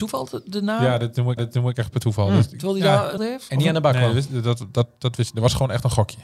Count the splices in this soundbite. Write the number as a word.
two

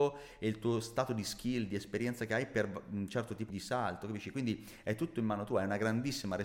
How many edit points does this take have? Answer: one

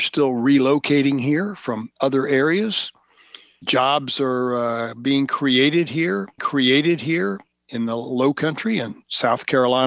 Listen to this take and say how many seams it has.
three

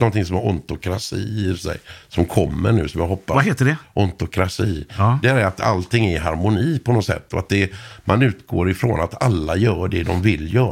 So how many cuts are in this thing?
zero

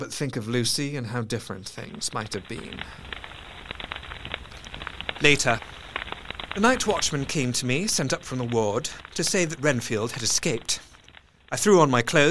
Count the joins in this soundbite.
zero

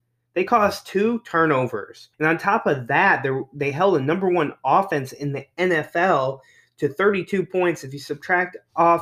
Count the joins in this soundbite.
one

